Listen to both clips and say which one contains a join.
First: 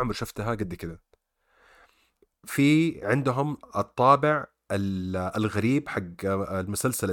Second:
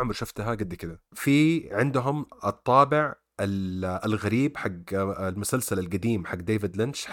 second; 1 cut; at 1.1 s

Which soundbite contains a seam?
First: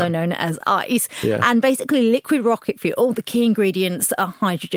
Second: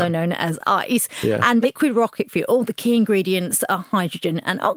second; 1 cut; at 1.6 s

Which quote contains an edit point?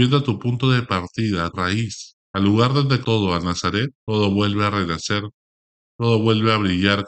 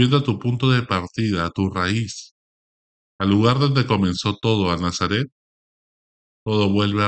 first; 4 cuts; at 1.5 s, 2.2 s, 3.0 s, 4.0 s

